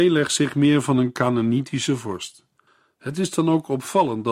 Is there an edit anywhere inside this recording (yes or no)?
no